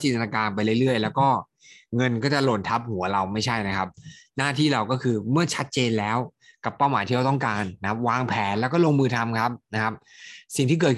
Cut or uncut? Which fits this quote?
uncut